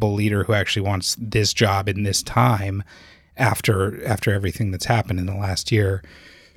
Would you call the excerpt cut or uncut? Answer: uncut